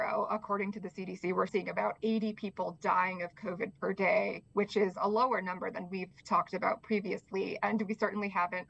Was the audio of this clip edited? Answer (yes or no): yes